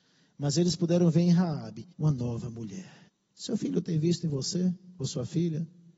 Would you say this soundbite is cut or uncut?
cut